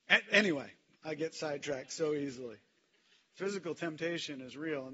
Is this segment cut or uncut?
uncut